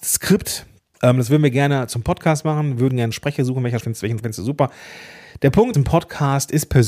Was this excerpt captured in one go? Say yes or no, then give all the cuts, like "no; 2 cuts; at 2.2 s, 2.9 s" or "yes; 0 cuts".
no; 3 cuts; at 3.8 s, 4.2 s, 5.7 s